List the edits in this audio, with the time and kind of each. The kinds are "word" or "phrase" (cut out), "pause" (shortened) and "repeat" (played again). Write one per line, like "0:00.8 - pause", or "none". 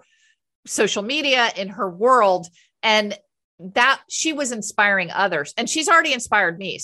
none